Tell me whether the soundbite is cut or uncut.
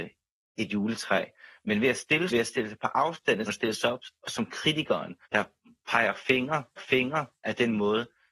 cut